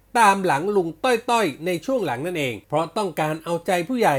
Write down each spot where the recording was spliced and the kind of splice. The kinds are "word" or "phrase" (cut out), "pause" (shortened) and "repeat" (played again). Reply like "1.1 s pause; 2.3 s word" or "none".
2.6 s pause